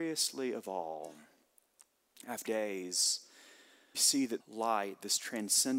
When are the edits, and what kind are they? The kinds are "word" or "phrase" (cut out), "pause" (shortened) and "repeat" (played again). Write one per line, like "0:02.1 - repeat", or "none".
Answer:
0:02.5 - word
0:03.9 - word
0:04.4 - word